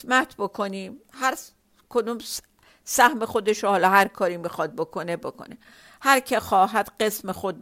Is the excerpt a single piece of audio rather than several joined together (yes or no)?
yes